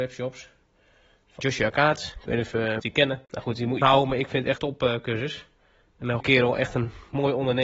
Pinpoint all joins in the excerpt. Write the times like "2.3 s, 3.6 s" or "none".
1.4 s, 2.8 s, 3.2 s, 3.8 s, 4.6 s, 6.2 s